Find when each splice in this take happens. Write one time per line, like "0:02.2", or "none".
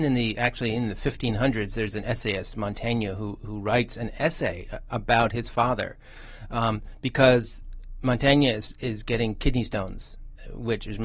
0:04.9